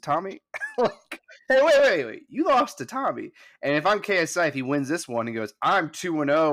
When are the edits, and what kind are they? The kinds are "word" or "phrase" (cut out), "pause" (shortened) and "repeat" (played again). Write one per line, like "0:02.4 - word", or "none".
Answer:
none